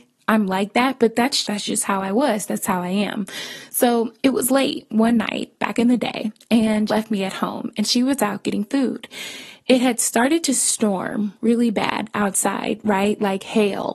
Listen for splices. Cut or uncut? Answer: cut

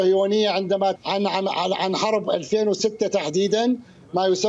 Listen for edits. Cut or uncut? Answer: cut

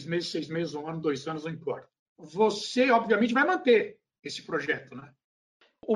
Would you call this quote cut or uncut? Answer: uncut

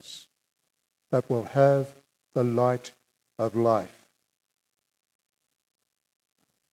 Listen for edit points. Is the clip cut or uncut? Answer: uncut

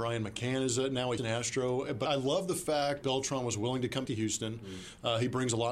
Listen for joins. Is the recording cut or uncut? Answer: cut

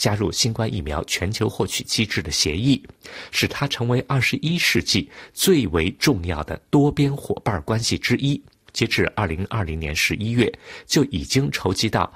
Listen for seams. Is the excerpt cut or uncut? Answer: uncut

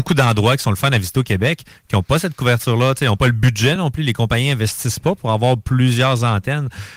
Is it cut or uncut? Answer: uncut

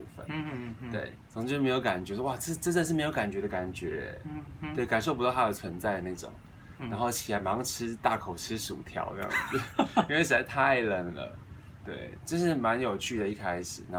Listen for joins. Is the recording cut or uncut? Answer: uncut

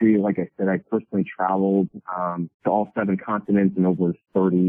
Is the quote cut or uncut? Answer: uncut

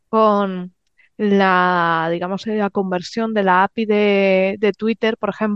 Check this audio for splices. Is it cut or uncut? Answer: uncut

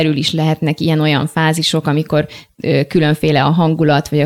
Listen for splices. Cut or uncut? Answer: uncut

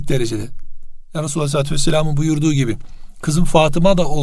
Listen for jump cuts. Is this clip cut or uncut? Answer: uncut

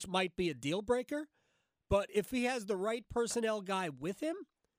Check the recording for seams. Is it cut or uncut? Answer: uncut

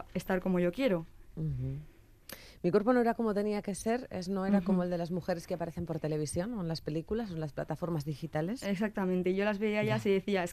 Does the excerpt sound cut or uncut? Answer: uncut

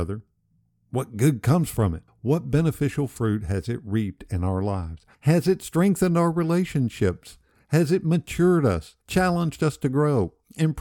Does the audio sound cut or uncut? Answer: cut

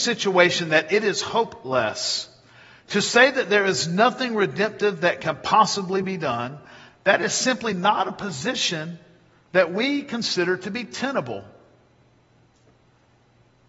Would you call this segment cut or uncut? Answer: uncut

